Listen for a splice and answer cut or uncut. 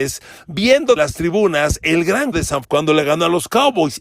cut